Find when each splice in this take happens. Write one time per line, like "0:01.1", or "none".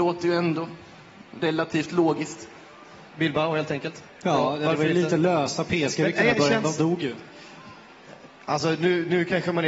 0:03.1
0:04.1